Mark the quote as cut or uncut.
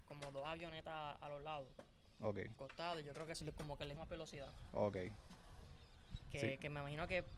cut